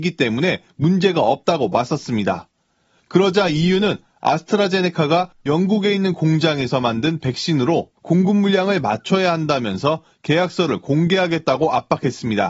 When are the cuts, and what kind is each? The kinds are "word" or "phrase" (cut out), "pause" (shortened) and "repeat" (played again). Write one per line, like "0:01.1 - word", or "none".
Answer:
none